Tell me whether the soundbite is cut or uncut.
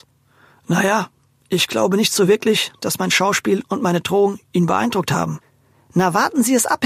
uncut